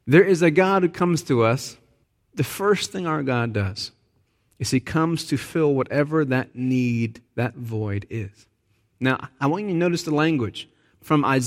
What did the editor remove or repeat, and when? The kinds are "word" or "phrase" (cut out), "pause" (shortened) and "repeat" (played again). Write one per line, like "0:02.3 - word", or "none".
0:02.0 - pause
0:07.3 - pause